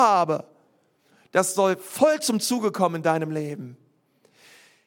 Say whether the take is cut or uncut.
uncut